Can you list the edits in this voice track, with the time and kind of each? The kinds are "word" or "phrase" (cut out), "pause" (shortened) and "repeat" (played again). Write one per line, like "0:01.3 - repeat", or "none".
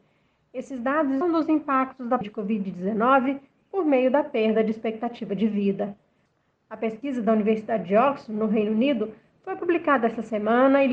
0:01.2 - phrase
0:02.2 - word